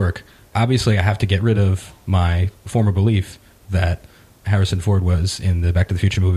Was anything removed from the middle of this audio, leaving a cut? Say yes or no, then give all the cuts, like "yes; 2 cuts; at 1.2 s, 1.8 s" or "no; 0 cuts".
no; 0 cuts